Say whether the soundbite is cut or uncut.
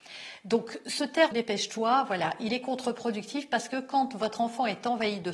cut